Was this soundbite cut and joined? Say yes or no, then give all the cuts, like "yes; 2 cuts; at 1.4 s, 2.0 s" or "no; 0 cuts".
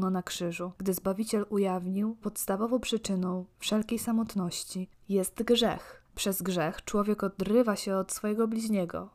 yes; 2 cuts; at 2.2 s, 6.1 s